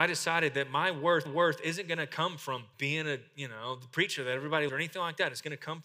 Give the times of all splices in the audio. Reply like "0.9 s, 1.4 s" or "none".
1.3 s, 2.7 s, 4.7 s